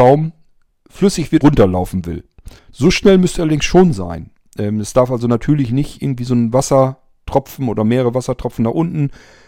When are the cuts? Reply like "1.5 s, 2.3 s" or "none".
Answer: 1.4 s, 2.6 s